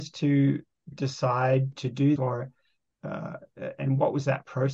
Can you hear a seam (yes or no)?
yes